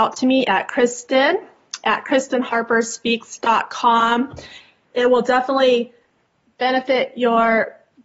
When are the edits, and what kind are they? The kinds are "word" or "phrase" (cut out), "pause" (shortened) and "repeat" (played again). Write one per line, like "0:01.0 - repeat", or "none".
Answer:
none